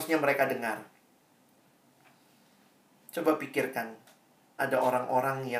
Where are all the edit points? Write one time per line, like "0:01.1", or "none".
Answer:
0:04.6

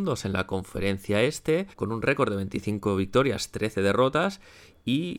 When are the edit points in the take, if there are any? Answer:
0:01.7

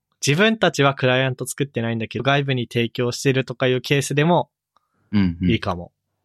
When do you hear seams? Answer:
0:02.2

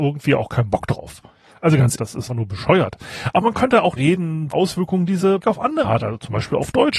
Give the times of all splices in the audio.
0:01.9
0:02.3
0:04.0
0:04.5
0:05.4
0:05.8

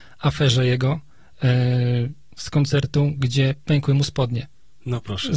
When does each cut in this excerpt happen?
none

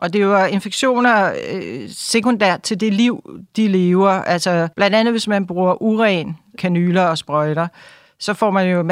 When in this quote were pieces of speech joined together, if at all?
0:04.7

